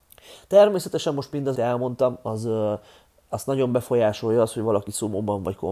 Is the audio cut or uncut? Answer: cut